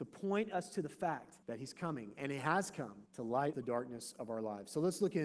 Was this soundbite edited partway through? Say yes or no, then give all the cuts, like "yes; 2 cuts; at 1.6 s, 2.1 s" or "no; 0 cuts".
yes; 3 cuts; at 1.4 s, 3.1 s, 3.5 s